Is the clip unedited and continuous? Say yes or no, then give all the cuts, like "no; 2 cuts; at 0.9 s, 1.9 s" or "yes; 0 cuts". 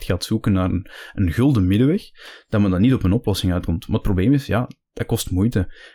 yes; 0 cuts